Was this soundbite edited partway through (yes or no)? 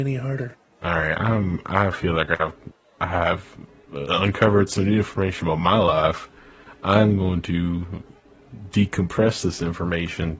no